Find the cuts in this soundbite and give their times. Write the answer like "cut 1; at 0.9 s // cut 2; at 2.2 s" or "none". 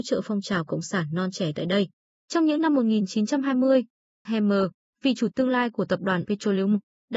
cut 1; at 4.3 s // cut 2; at 5.3 s // cut 3; at 6.2 s